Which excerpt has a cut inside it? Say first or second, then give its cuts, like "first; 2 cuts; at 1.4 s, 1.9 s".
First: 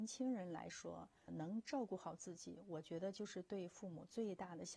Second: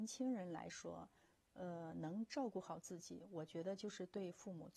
first; 1 cut; at 1.3 s